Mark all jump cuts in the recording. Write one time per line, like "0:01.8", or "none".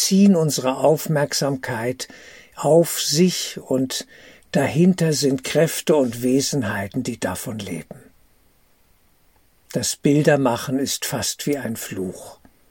none